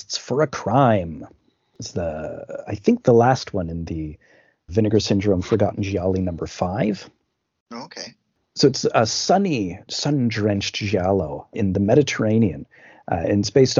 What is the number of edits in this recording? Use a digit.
3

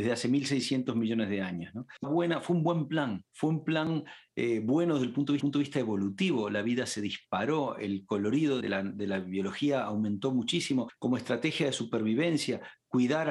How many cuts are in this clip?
4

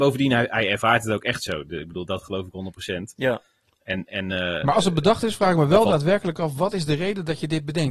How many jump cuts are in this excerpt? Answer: 1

